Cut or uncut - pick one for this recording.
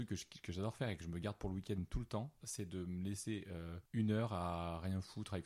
cut